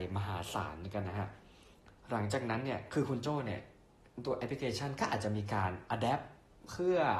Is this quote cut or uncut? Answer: cut